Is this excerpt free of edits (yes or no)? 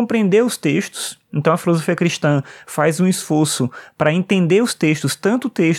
yes